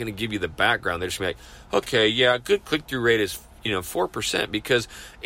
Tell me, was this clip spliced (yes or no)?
no